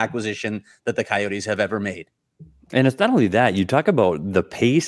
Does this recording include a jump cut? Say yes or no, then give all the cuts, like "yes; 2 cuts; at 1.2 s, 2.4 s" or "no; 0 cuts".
no; 0 cuts